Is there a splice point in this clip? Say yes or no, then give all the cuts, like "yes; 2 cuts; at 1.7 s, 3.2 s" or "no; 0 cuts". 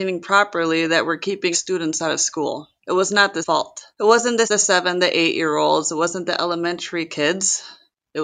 yes; 5 cuts; at 1.5 s, 2.8 s, 3.4 s, 3.9 s, 4.5 s